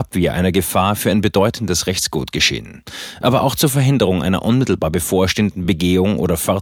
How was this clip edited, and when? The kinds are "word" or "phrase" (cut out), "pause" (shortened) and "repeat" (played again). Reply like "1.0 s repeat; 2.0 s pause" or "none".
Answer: none